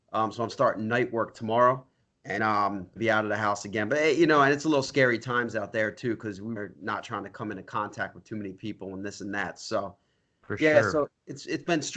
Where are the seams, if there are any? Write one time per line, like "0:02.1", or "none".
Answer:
0:02.4
0:03.0
0:06.6

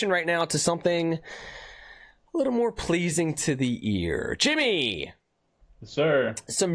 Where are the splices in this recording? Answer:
none

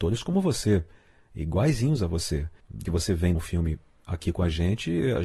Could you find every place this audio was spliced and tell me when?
0:02.9
0:03.4

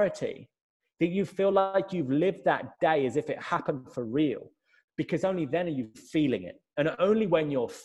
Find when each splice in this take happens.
none

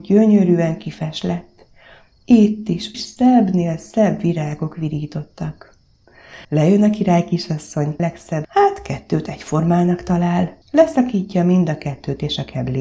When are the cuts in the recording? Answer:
0:02.9
0:06.4
0:08.0
0:08.4
0:10.6

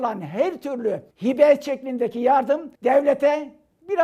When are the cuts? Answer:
0:01.1
0:02.8

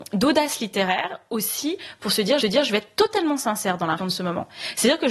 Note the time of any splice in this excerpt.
0:02.4
0:04.0

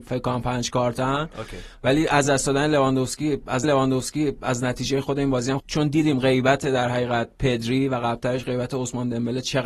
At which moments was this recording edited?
0:03.6
0:05.6

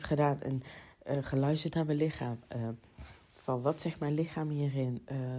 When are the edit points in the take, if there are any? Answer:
none

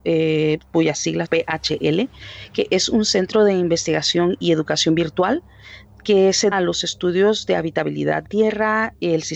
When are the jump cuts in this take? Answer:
0:01.2
0:06.5
0:08.2

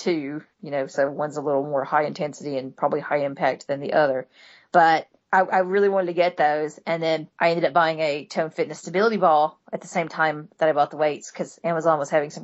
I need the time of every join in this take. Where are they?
0:05.2
0:07.3

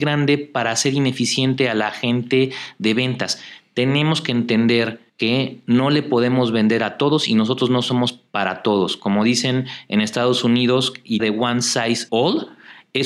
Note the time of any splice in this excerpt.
0:05.1
0:08.3
0:11.2
0:12.1

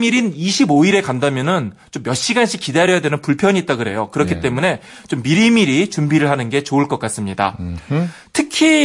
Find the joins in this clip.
none

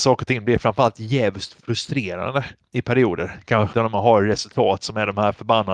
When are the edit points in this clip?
0:03.7

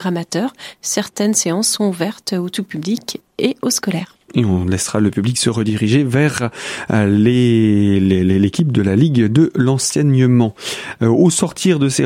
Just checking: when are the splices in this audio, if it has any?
none

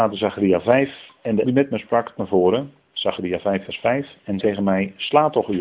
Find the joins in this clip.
0:01.4
0:02.2
0:04.4

